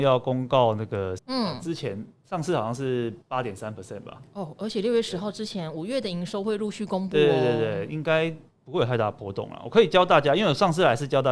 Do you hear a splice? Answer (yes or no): yes